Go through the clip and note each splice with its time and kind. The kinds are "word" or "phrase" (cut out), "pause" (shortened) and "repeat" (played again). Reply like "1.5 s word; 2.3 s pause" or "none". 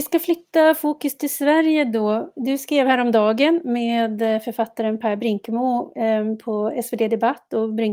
none